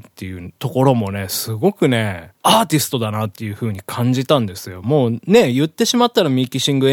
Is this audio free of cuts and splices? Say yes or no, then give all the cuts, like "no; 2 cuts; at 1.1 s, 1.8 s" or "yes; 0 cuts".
no; 1 cut; at 2.4 s